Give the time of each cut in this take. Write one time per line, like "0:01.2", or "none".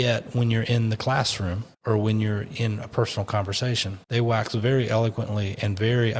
0:01.7
0:04.0